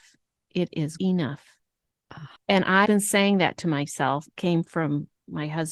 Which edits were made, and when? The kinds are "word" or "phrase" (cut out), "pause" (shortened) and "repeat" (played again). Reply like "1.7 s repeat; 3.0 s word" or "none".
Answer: 1.0 s word; 2.4 s pause; 2.9 s word; 4.3 s word

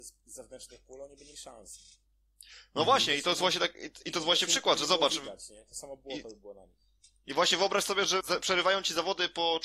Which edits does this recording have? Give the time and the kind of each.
1.3 s word; 8.2 s phrase

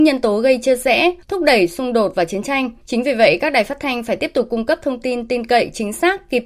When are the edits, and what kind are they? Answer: 1.2 s pause; 2.8 s pause

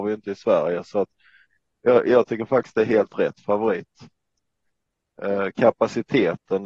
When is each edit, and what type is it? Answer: none

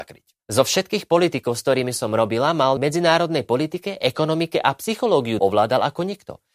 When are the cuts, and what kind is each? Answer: 2.8 s phrase; 5.4 s word

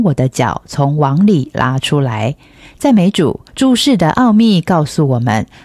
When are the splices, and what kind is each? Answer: 3.5 s pause

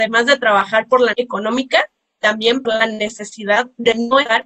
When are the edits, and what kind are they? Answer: 1.1 s word; 2.2 s word; 2.6 s word

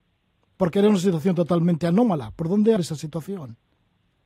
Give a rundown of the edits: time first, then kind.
2.8 s word

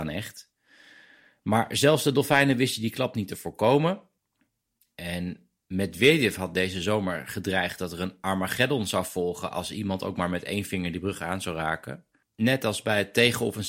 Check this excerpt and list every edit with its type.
5.6 s pause

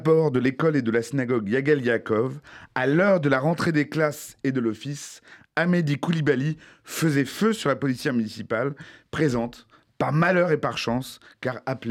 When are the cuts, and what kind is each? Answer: none

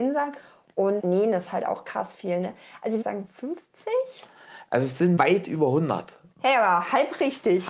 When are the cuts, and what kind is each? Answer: 1.0 s word; 3.0 s phrase; 5.2 s word; 6.3 s pause

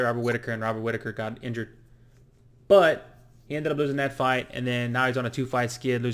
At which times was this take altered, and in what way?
none

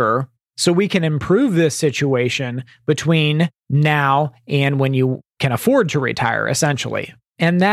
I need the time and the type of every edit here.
none

